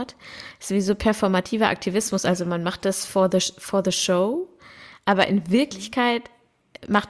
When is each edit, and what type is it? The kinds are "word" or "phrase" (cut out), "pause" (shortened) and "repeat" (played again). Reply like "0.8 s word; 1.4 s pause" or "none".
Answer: none